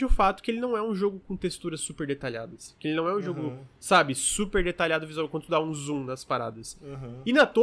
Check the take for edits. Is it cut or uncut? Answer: uncut